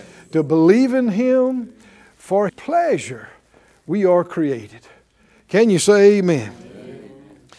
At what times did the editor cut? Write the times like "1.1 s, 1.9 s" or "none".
2.5 s